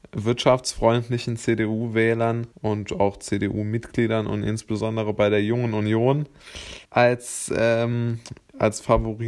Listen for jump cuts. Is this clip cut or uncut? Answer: cut